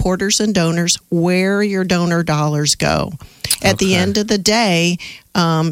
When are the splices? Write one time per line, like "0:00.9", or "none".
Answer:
none